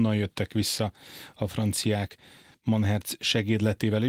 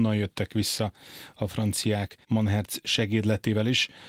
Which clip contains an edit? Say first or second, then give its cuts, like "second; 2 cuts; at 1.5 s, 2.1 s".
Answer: second; 1 cut; at 2.2 s